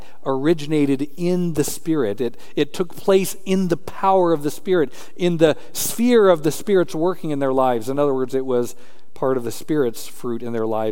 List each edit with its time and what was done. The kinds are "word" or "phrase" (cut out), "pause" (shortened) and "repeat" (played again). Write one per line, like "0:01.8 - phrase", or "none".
none